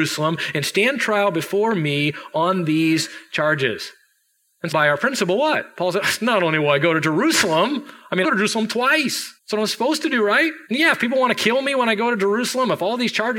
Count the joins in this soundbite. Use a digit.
4